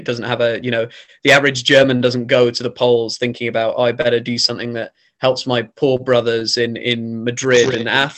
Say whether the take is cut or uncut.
uncut